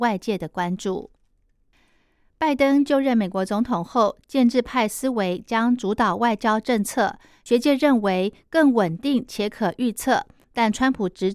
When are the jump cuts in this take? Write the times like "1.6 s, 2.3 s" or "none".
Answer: none